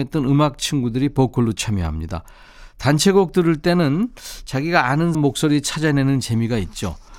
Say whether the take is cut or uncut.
cut